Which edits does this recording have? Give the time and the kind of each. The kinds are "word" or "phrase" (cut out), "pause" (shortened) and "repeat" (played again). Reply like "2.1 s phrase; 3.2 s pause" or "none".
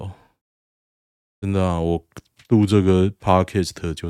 none